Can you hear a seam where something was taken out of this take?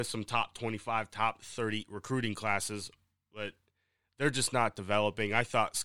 no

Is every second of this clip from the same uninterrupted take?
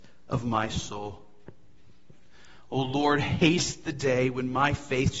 yes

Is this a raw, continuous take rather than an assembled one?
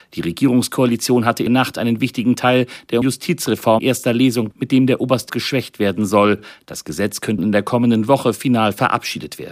no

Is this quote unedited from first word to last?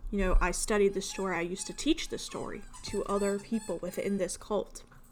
yes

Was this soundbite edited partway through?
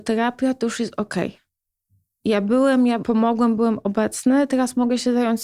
no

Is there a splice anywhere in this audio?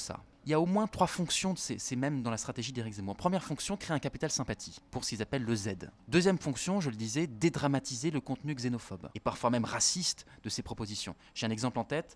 no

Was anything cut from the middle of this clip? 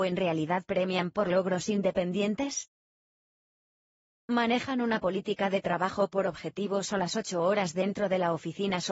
no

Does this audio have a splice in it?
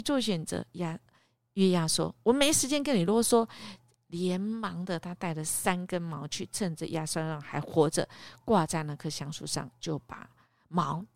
no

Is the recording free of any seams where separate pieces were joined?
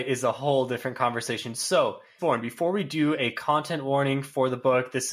no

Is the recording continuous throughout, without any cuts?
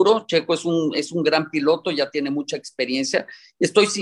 yes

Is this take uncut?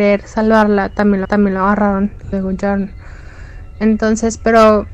no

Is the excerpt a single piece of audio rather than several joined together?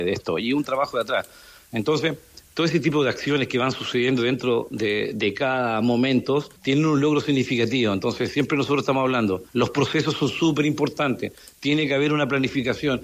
no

